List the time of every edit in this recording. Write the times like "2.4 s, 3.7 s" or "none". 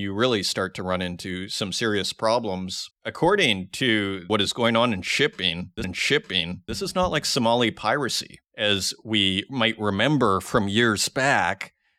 2.9 s, 5.8 s, 8.5 s

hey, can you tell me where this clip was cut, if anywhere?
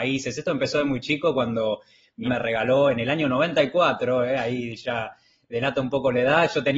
2.2 s

